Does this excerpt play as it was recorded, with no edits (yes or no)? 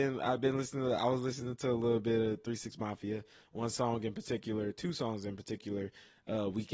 yes